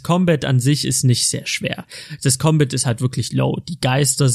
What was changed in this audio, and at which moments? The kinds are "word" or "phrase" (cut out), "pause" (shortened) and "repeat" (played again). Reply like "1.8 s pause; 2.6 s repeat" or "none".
none